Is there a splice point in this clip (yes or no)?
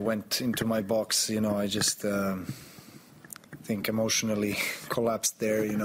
no